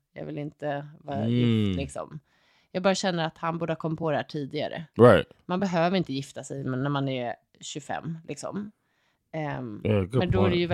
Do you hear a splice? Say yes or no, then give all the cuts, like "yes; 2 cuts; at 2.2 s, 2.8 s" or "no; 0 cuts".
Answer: no; 0 cuts